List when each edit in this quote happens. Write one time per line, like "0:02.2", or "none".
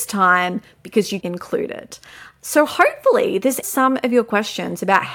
0:01.2
0:03.6